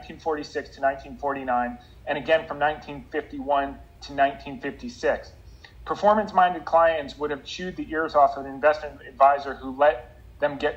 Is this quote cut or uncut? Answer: uncut